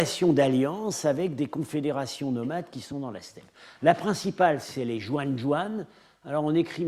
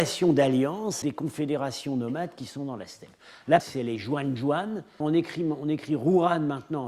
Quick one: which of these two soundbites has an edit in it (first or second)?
second